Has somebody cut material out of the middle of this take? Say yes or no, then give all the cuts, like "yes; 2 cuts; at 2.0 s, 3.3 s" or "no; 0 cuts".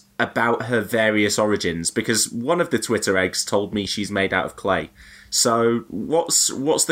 no; 0 cuts